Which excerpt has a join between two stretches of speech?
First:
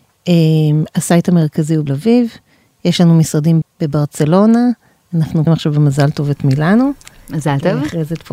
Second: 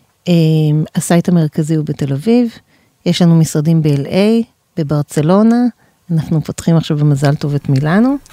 first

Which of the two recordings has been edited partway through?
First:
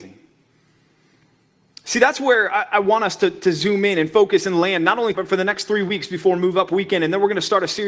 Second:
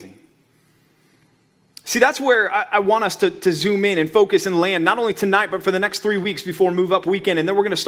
first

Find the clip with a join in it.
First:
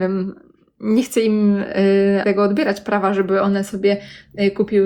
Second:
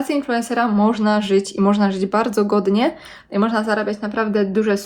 first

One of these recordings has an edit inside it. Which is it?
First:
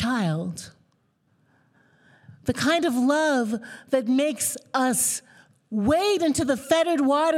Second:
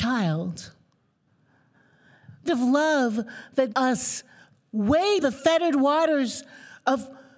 second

